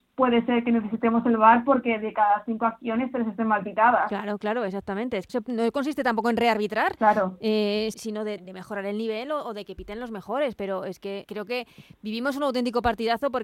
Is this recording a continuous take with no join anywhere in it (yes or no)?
no